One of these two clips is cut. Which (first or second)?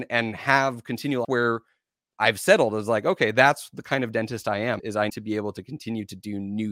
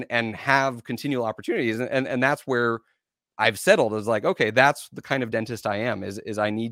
first